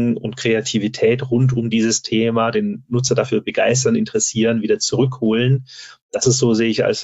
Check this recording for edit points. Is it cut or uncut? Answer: uncut